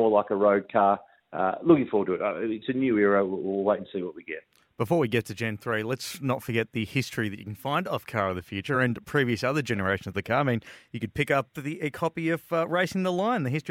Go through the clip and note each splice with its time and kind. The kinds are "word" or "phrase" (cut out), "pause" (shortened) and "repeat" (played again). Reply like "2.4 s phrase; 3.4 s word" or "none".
none